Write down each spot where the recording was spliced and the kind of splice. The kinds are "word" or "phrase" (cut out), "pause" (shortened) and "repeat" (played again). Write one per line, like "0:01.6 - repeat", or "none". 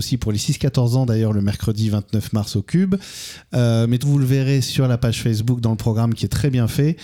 0:04.0 - word